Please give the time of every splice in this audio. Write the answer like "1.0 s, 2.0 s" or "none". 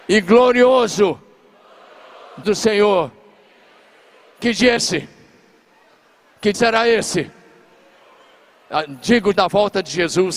2.4 s, 4.8 s, 6.5 s, 9.3 s